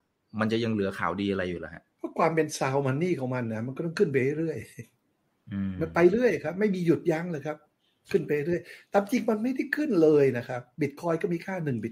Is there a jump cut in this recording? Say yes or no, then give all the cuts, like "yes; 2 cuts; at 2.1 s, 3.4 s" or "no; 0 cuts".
yes; 1 cut; at 1.9 s